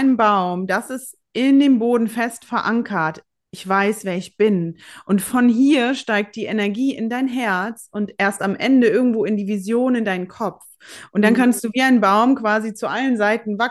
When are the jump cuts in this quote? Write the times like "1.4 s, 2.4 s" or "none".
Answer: none